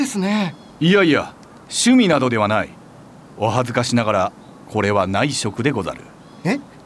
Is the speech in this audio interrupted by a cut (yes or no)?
no